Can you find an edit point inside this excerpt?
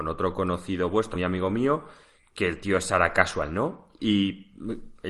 yes; 1 cut; at 1.1 s

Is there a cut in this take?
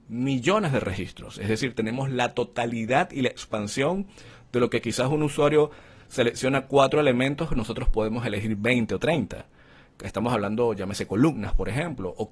no; 0 cuts

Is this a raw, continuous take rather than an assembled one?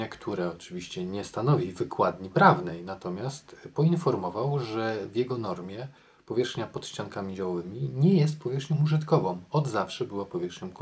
yes; 0 cuts

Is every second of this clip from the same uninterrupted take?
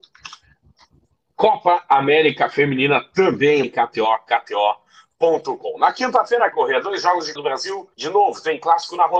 no; 4 cuts; at 3.6 s, 6.5 s, 7.4 s, 7.9 s

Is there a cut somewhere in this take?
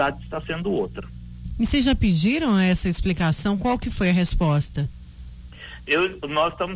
no; 0 cuts

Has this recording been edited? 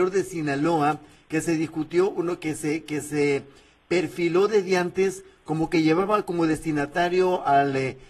no; 0 cuts

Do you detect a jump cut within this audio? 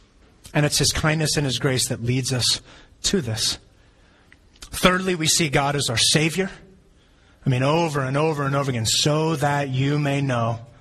no; 0 cuts

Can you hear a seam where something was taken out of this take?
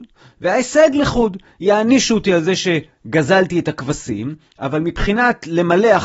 no; 0 cuts

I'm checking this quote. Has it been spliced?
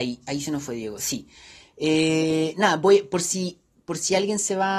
no; 0 cuts

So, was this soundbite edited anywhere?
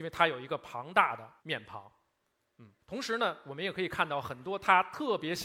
yes; 2 cuts; at 1.4 s, 2.8 s

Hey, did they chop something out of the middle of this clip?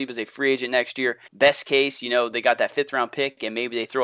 yes; 1 cut; at 1.3 s

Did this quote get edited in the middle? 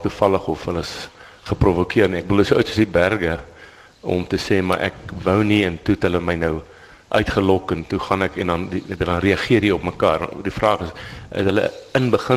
no; 0 cuts

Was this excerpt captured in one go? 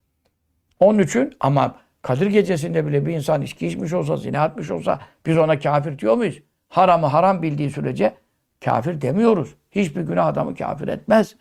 yes; 0 cuts

